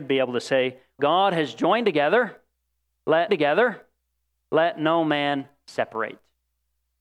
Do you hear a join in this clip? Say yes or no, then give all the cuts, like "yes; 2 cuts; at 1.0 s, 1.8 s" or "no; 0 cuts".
yes; 2 cuts; at 1.0 s, 3.3 s